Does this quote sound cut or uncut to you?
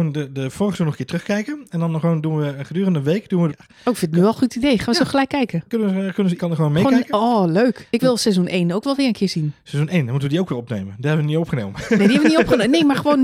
cut